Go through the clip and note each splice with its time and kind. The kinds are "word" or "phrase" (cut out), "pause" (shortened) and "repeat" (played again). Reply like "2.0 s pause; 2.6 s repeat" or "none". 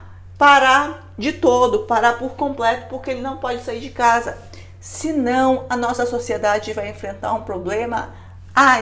none